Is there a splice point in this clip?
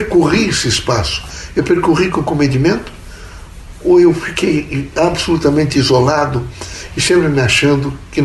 no; 0 cuts

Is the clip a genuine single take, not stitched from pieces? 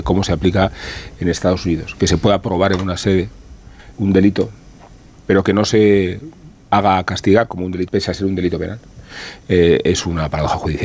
no; 2 cuts; at 3.9 s, 7.9 s

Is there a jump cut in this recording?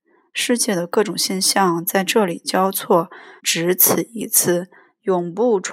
yes; 1 cut; at 3.4 s

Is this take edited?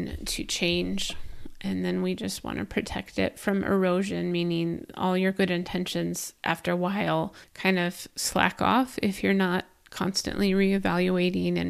yes; 2 cuts; at 6.4 s, 7.4 s

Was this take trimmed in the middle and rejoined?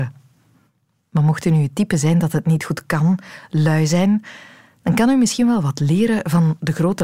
no; 0 cuts

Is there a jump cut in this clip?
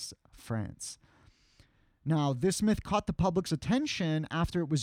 no; 0 cuts

